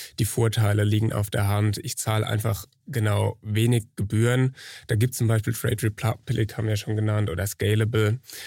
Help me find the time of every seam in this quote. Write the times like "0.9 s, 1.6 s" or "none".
none